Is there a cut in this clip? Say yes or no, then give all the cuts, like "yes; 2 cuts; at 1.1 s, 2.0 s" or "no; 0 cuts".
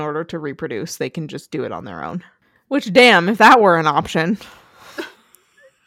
no; 0 cuts